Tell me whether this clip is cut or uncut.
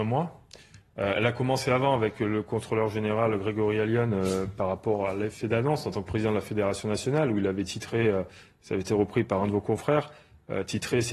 uncut